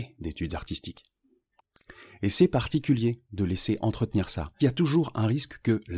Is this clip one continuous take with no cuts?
no; 1 cut; at 4.6 s

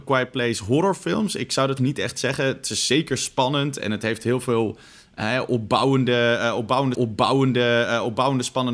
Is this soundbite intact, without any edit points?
no; 2 cuts; at 1.8 s, 6.9 s

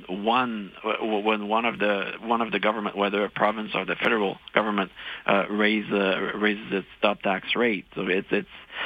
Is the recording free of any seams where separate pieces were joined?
yes; 0 cuts

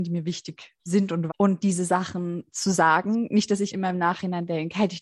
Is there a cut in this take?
yes; 2 cuts; at 1.3 s, 3.7 s

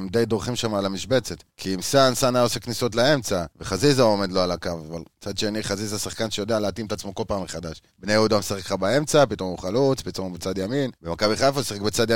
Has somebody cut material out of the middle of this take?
yes; 5 cuts; at 1.5 s, 3.5 s, 5.1 s, 7.9 s, 10.9 s

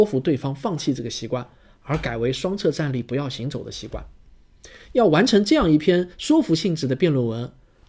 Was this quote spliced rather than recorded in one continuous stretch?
no; 0 cuts

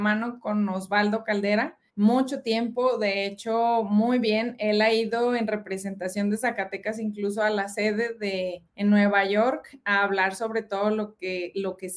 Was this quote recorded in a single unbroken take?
no; 2 cuts; at 1.9 s, 8.7 s

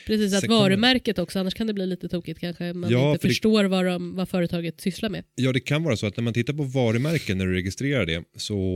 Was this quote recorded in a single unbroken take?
yes; 0 cuts

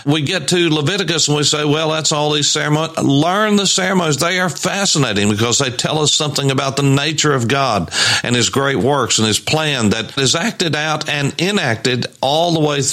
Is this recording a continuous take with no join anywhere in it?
yes; 0 cuts

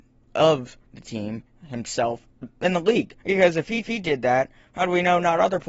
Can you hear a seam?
yes; 3 cuts; at 2.4 s, 3.2 s, 3.8 s

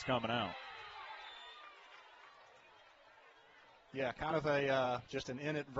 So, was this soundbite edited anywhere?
no; 0 cuts

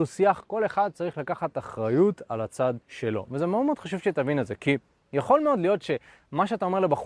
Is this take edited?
yes; 1 cut; at 2.8 s

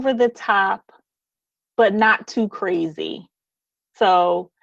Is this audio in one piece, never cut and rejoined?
yes; 0 cuts

